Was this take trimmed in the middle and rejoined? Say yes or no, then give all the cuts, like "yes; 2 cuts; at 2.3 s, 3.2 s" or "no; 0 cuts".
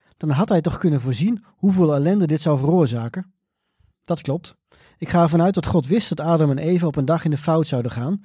no; 0 cuts